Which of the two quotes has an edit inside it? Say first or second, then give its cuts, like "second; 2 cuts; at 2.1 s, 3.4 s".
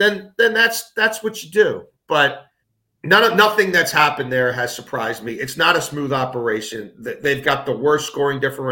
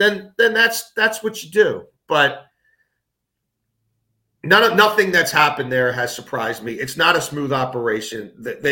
first; 1 cut; at 2.6 s